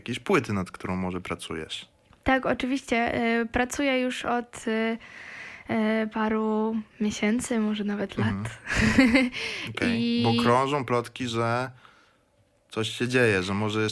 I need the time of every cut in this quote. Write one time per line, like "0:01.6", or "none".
none